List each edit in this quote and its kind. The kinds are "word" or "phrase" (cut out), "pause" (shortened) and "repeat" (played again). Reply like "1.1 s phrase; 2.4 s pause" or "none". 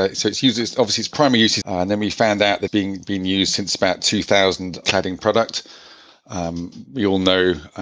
1.6 s word; 2.7 s word; 4.8 s phrase